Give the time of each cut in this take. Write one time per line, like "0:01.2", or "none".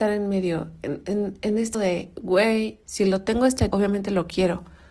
0:01.0
0:01.7
0:02.8
0:03.7